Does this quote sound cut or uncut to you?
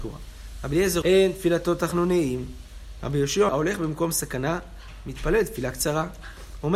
cut